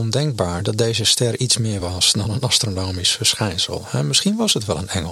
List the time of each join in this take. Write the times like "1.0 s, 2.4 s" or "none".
none